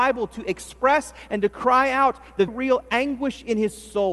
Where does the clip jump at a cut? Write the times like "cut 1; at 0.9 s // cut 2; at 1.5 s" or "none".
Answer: cut 1; at 2.5 s